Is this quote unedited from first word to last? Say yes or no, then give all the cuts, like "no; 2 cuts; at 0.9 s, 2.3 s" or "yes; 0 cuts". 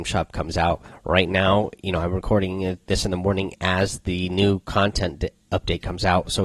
yes; 0 cuts